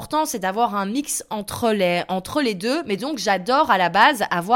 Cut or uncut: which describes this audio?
uncut